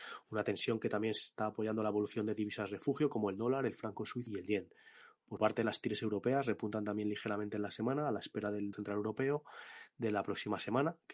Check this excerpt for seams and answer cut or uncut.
cut